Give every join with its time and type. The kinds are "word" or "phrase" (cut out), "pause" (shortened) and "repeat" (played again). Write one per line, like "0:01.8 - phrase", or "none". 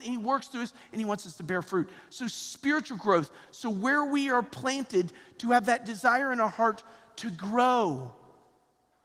none